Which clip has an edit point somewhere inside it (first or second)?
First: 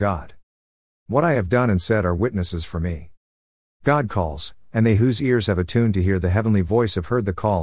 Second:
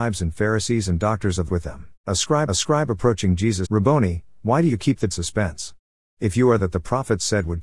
second